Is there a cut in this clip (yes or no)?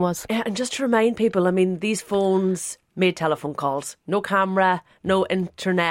no